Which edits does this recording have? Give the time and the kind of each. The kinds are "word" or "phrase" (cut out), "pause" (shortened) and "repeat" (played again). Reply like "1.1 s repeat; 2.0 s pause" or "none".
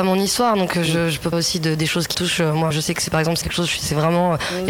1.3 s word; 2.1 s word; 2.7 s word; 3.4 s word